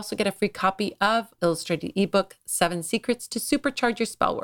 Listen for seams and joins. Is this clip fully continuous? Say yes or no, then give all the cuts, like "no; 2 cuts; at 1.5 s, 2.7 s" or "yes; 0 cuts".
no; 1 cut; at 1.4 s